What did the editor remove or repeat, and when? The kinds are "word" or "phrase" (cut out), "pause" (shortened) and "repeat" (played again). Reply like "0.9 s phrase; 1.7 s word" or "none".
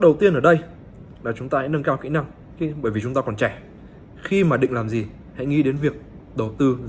none